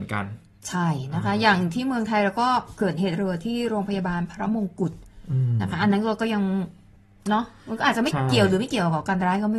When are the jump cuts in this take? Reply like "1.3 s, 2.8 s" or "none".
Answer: none